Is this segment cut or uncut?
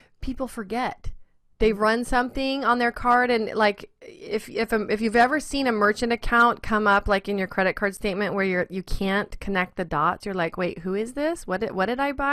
uncut